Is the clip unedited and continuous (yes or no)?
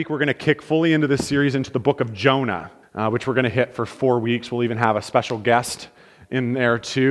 no